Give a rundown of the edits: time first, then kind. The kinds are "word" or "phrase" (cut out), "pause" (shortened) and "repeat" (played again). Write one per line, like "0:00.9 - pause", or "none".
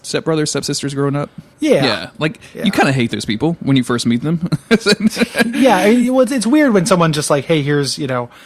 0:01.5 - pause